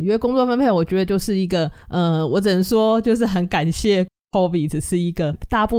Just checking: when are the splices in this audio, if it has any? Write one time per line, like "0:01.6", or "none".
0:01.8